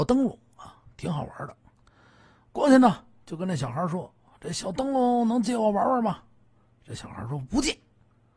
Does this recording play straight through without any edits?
yes; 0 cuts

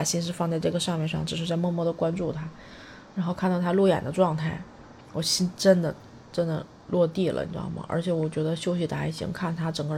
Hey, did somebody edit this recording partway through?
yes; 1 cut; at 5.0 s

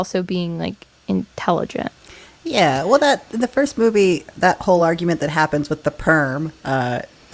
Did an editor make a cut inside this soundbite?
no; 0 cuts

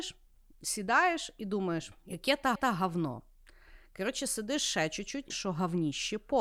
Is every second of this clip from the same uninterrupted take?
no; 3 cuts; at 2.0 s, 2.5 s, 5.3 s

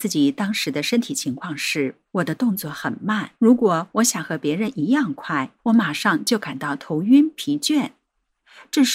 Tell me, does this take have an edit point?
yes; 3 cuts; at 2.1 s, 3.4 s, 5.6 s

